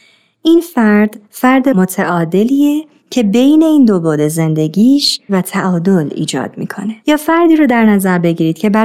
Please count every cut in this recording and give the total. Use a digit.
3